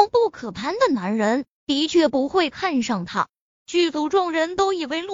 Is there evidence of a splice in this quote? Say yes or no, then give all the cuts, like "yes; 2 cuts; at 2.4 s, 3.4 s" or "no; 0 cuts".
yes; 1 cut; at 3.4 s